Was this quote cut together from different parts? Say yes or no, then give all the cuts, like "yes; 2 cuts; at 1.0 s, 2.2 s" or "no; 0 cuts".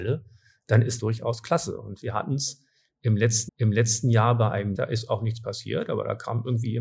yes; 3 cuts; at 1.0 s, 3.5 s, 4.7 s